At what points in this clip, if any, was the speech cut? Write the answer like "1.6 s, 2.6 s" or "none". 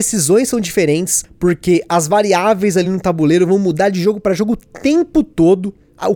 none